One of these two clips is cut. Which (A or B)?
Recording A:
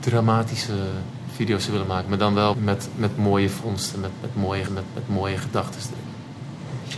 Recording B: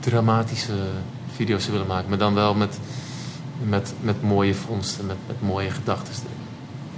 A